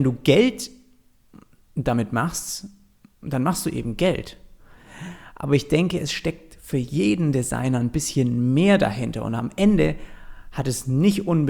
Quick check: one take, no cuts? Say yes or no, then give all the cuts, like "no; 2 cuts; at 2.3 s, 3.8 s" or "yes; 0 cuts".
yes; 0 cuts